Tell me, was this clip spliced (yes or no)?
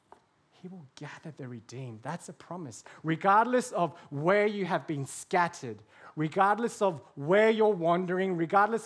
no